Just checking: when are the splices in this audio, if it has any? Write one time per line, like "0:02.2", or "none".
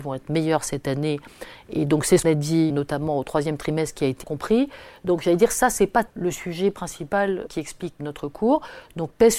0:02.2
0:02.7
0:04.2
0:06.1
0:07.5
0:08.0